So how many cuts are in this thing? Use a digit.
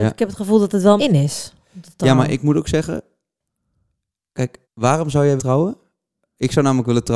3